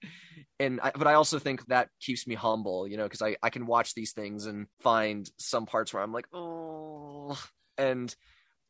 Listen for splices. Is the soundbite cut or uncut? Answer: cut